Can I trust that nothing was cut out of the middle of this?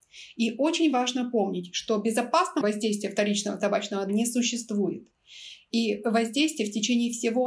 no; 2 cuts; at 2.6 s, 4.1 s

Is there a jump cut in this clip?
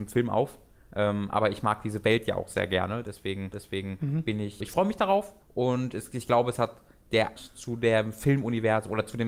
yes; 4 cuts; at 3.5 s, 4.6 s, 5.4 s, 7.4 s

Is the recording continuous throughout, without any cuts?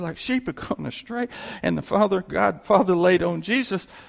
yes; 0 cuts

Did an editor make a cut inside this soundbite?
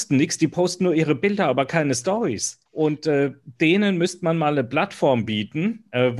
yes; 1 cut; at 2.7 s

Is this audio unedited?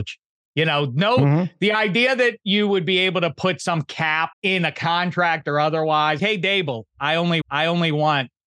no; 3 cuts; at 4.3 s, 6.2 s, 7.4 s

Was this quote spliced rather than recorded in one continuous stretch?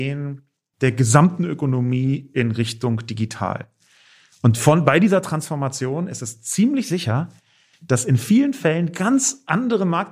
no; 0 cuts

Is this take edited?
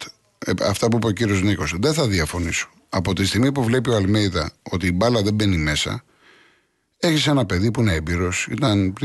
no; 0 cuts

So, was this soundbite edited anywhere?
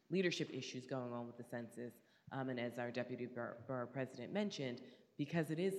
no; 0 cuts

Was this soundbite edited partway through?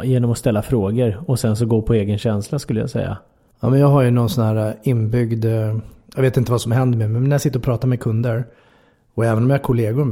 no; 0 cuts

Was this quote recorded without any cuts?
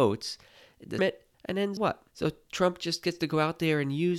no; 4 cuts; at 1.0 s, 1.3 s, 1.8 s, 2.1 s

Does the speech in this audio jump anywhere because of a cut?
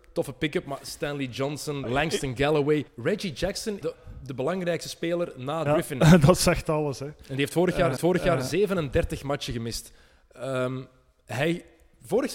yes; 5 cuts; at 1.8 s, 2.9 s, 3.8 s, 5.7 s, 8.0 s

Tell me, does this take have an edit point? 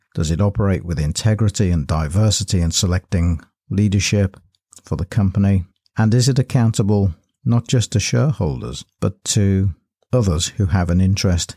no; 0 cuts

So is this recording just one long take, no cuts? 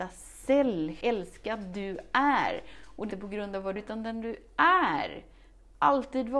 no; 3 cuts; at 1.0 s, 3.1 s, 3.8 s

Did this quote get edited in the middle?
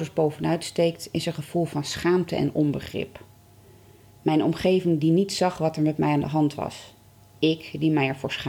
no; 0 cuts

